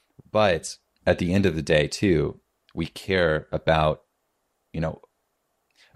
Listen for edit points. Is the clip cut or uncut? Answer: uncut